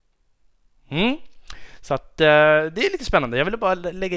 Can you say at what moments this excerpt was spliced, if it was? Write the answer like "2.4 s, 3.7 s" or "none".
none